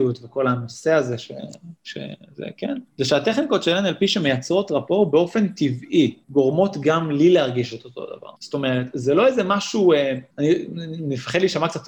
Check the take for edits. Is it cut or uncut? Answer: cut